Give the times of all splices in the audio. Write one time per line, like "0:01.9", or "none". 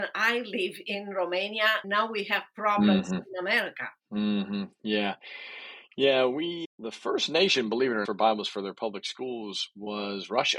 0:01.8
0:04.0
0:06.6
0:08.0

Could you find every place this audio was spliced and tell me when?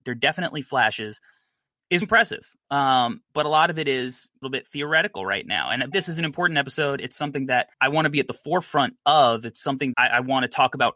0:02.0
0:03.3
0:04.4
0:05.9
0:07.7
0:09.9

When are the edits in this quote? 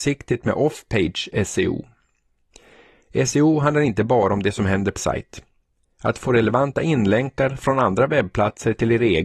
0:05.0

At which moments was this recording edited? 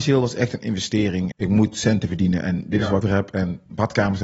0:01.3
0:03.0

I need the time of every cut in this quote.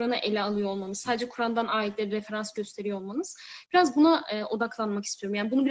none

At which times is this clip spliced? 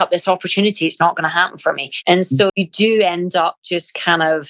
0:02.5

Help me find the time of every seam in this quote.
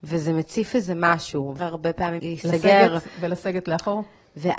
0:01.6
0:02.2

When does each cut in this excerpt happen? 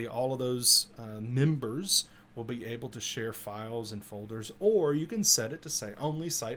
none

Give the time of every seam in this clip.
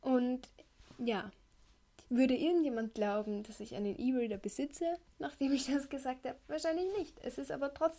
none

